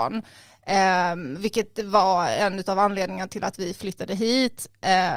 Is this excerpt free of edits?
yes; 0 cuts

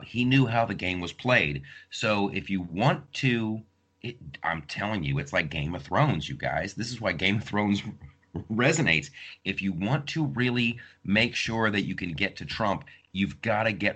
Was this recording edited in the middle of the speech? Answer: no; 0 cuts

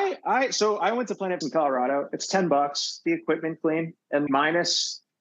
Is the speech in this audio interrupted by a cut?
yes; 3 cuts; at 1.4 s, 3.1 s, 4.3 s

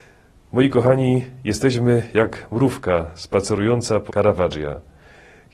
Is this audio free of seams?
no; 1 cut; at 4.1 s

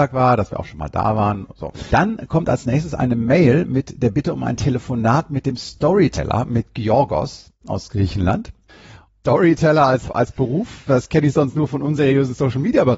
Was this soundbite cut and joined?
no; 0 cuts

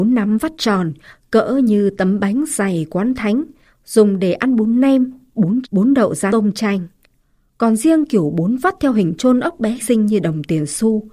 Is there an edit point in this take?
yes; 3 cuts; at 5.6 s, 6.3 s, 9.8 s

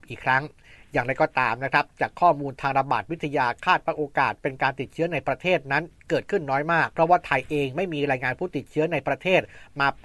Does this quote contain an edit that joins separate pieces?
yes; 1 cut; at 6.9 s

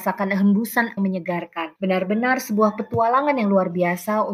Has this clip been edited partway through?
yes; 2 cuts; at 1.0 s, 1.8 s

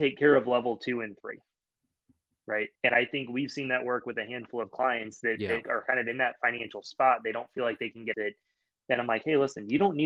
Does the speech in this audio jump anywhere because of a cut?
yes; 2 cuts; at 2.7 s, 8.1 s

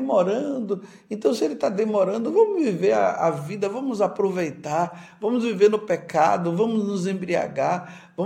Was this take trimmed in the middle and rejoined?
no; 0 cuts

